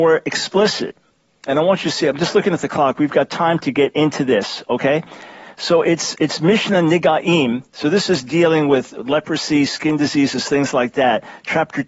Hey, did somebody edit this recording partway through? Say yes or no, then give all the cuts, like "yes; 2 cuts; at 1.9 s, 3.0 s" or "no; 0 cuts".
no; 0 cuts